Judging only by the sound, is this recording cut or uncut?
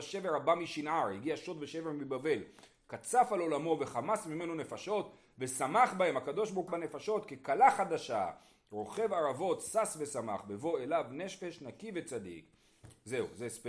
cut